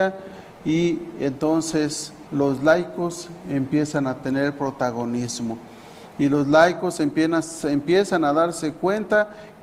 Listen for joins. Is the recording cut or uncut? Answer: cut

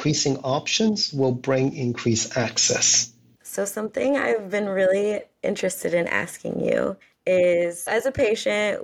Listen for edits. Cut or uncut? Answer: cut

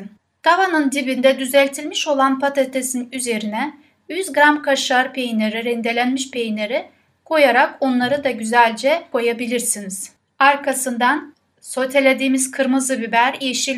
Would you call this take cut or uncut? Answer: uncut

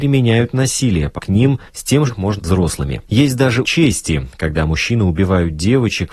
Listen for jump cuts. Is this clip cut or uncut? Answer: cut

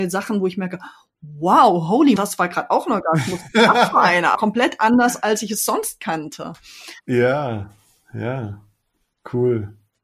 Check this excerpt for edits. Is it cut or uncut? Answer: cut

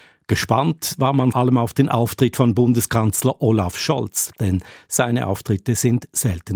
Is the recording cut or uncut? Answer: cut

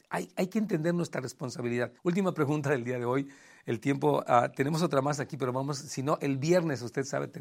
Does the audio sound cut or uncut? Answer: cut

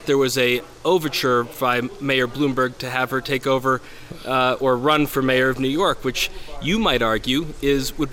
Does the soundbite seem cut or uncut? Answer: uncut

